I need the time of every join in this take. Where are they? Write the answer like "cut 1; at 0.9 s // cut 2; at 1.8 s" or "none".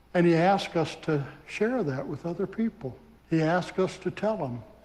cut 1; at 1.4 s // cut 2; at 3.2 s